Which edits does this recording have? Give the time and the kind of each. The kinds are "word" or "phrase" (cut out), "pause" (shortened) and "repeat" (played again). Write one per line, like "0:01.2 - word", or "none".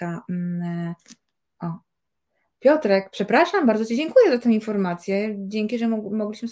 none